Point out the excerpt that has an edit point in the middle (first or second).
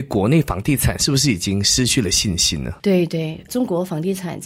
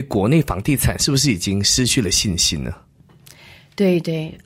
first